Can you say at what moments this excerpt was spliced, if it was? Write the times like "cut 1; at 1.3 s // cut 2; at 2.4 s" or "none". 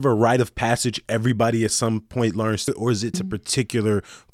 cut 1; at 2.7 s // cut 2; at 3.1 s

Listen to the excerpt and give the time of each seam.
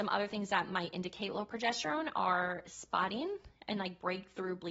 none

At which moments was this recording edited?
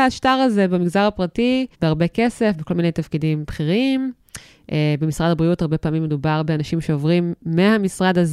cut 1; at 1.7 s

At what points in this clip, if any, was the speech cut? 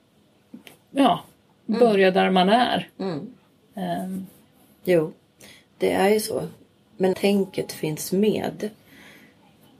cut 1; at 7.1 s

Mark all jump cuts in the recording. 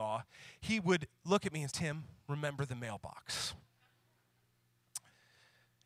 cut 1; at 1.7 s

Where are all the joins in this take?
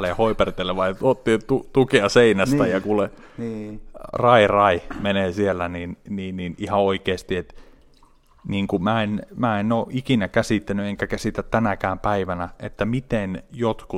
none

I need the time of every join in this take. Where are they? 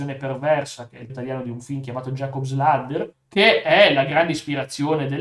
cut 1; at 1.1 s // cut 2; at 3.1 s

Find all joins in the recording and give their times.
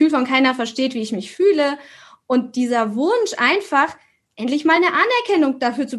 none

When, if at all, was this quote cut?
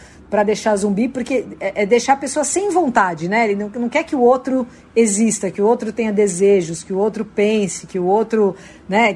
none

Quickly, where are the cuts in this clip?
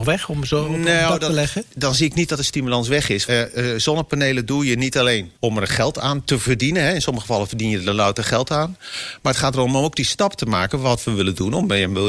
cut 1; at 1.7 s // cut 2; at 3.3 s // cut 3; at 5.4 s

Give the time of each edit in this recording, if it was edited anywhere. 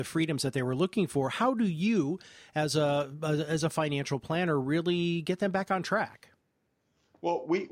none

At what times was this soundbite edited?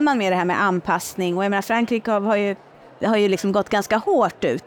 cut 1; at 2.7 s

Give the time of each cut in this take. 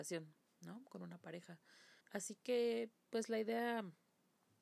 cut 1; at 2.0 s

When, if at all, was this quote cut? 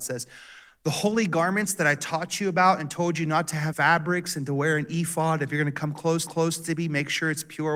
cut 1; at 3.7 s // cut 2; at 6.3 s

